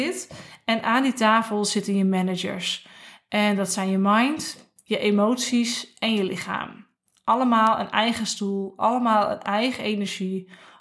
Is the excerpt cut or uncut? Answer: uncut